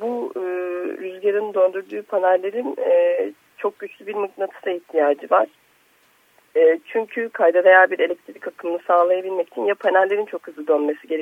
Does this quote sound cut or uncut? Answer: uncut